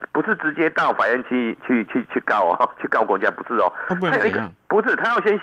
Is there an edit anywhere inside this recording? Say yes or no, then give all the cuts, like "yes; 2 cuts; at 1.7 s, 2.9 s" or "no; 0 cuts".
no; 0 cuts